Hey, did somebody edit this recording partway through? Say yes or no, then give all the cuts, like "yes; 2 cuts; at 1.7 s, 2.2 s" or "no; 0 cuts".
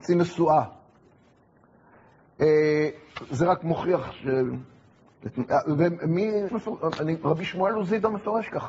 yes; 1 cut; at 6.5 s